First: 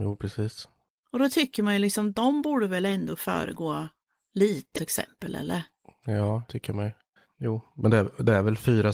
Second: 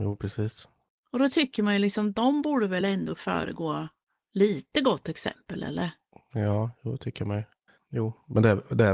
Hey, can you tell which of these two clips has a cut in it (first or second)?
first